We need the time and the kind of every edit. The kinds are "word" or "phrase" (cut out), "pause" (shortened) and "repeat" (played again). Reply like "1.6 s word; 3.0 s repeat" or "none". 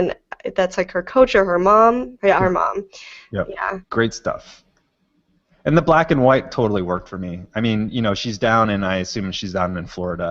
3.8 s pause